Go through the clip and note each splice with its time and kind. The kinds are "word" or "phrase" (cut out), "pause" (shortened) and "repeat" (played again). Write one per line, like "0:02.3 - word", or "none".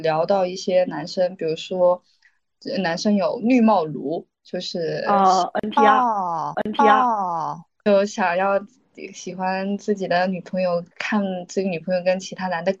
0:04.3 - pause
0:06.5 - repeat
0:10.9 - pause